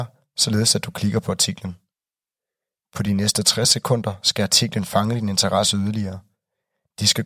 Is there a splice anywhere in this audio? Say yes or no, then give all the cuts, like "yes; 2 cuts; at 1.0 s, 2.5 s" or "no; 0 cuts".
no; 0 cuts